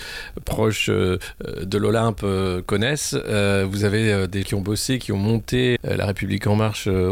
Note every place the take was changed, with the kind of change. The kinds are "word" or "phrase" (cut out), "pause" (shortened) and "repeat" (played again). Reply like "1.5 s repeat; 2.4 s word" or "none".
4.4 s word; 5.8 s word

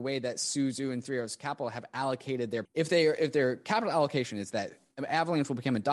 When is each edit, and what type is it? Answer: 2.7 s phrase

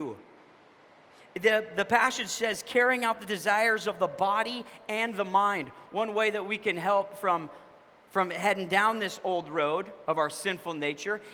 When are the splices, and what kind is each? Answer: none

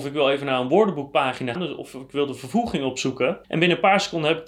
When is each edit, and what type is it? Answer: 1.6 s word; 3.4 s pause

